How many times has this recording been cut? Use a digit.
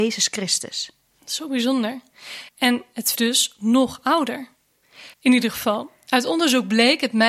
3